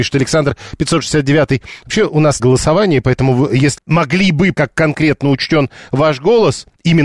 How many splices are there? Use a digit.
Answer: 3